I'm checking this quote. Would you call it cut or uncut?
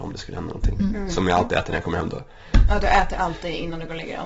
uncut